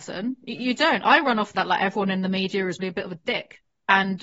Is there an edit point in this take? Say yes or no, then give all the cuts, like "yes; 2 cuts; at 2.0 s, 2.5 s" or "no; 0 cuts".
yes; 2 cuts; at 1.5 s, 2.8 s